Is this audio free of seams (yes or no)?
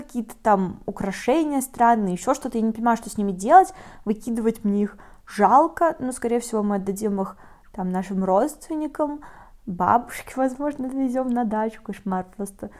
yes